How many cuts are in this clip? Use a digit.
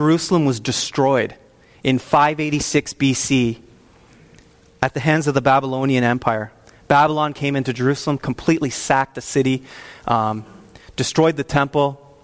0